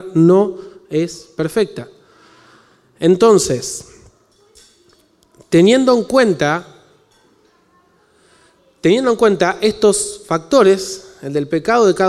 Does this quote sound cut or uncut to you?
uncut